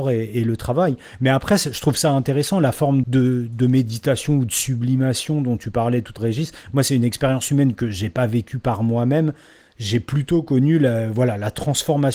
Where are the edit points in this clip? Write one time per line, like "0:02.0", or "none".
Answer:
0:03.0
0:06.2